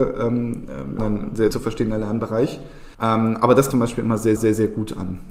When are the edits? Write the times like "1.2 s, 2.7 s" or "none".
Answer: 1.0 s, 1.5 s, 2.9 s, 3.7 s, 4.4 s